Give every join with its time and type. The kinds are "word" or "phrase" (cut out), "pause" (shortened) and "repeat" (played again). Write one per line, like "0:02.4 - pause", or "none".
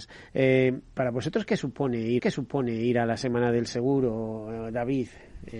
0:02.2 - repeat